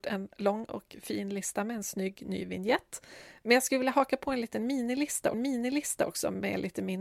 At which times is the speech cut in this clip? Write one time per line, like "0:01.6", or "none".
0:05.3